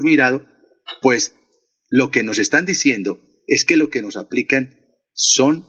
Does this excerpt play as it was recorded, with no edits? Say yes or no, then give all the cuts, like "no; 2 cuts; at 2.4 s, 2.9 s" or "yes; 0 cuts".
yes; 0 cuts